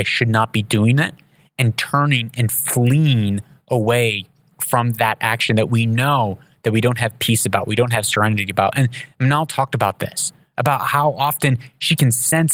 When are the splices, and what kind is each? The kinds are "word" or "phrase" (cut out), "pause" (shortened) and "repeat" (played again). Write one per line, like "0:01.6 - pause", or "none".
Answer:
none